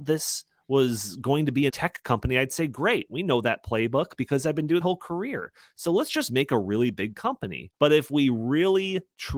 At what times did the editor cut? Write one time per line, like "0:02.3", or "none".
0:01.7
0:04.8
0:07.8